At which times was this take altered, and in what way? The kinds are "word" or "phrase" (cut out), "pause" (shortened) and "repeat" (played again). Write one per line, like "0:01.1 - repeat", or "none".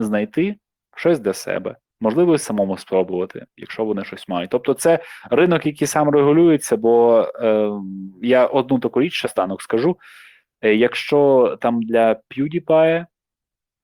0:01.9 - word
0:09.2 - word